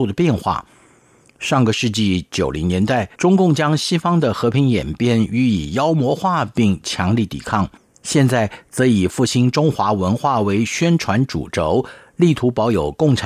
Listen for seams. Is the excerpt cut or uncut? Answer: cut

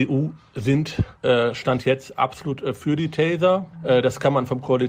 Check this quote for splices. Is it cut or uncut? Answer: uncut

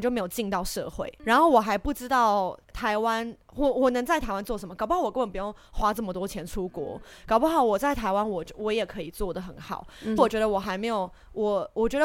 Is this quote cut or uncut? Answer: cut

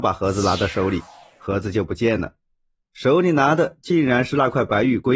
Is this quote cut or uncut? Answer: uncut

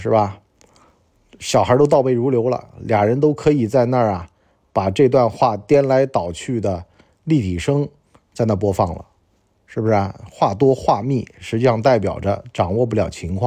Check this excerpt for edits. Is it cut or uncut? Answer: uncut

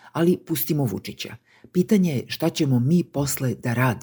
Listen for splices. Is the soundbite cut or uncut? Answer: uncut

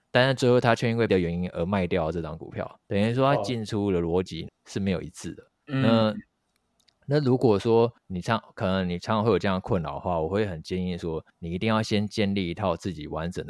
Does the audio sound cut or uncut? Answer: cut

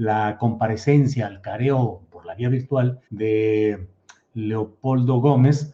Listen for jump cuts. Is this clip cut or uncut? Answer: cut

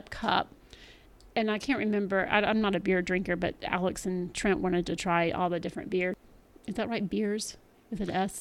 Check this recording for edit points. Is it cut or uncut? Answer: uncut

